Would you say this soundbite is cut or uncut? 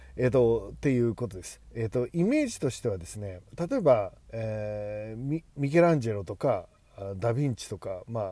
cut